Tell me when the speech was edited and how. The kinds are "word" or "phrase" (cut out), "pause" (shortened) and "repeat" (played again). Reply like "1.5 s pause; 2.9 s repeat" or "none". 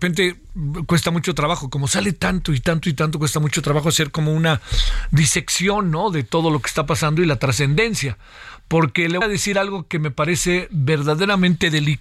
9.2 s word